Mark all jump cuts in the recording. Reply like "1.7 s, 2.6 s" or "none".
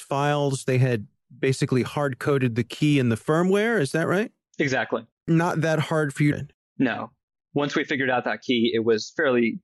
6.3 s